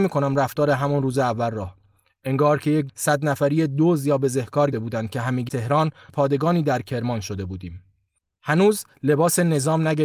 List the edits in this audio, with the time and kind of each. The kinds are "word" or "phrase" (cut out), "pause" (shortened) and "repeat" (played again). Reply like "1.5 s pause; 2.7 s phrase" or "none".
2.9 s word; 4.7 s word; 5.5 s word; 6.1 s word